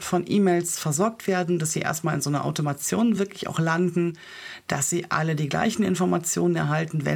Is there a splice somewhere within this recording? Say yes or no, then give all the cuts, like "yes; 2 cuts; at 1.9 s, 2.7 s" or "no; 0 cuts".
no; 0 cuts